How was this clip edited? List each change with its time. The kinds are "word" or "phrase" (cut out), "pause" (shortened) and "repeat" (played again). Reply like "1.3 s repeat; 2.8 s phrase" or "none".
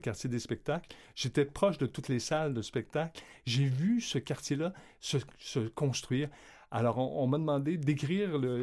none